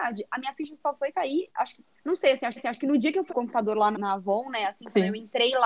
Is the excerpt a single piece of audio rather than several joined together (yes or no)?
no